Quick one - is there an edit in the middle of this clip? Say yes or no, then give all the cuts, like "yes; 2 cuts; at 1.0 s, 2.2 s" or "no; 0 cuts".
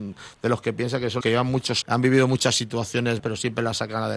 yes; 3 cuts; at 1.2 s, 1.8 s, 3.2 s